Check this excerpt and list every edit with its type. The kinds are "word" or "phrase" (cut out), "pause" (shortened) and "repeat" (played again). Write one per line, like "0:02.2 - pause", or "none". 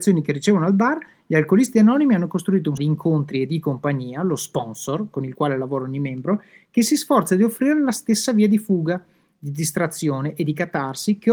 0:02.8 - word